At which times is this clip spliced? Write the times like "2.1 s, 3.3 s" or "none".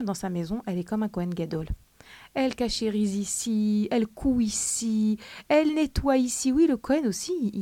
none